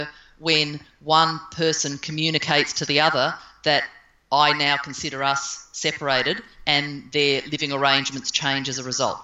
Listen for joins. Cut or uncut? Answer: uncut